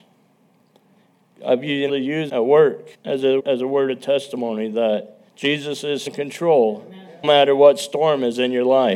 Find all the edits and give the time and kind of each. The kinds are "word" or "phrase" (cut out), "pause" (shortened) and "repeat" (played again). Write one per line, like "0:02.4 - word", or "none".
0:01.9 - word
0:02.3 - word
0:02.9 - pause
0:03.4 - word
0:05.3 - pause
0:06.1 - word
0:07.2 - word